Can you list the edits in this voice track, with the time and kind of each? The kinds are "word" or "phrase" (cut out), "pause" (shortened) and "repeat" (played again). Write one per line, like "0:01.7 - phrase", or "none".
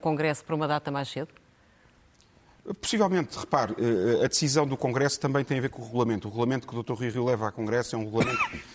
none